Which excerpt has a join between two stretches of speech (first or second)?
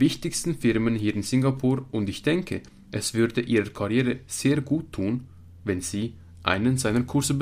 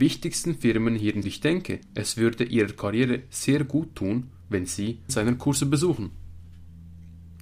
second